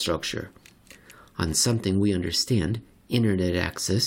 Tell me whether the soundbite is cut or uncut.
uncut